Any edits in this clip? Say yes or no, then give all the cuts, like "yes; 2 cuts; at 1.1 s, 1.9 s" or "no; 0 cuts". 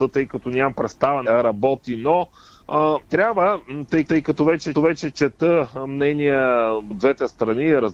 yes; 5 cuts; at 1.2 s, 3.0 s, 4.1 s, 4.7 s, 6.9 s